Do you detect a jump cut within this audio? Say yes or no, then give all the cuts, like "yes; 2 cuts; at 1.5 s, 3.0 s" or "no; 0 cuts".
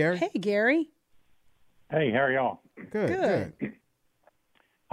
no; 0 cuts